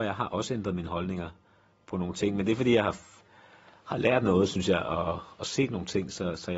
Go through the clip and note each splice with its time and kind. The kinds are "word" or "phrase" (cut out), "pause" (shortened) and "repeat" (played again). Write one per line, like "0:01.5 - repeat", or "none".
none